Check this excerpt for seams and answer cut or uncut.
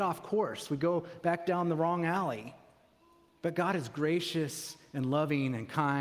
uncut